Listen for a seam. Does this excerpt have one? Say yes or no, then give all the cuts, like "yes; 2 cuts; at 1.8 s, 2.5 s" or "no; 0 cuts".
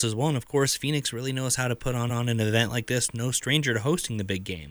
yes; 1 cut; at 2.1 s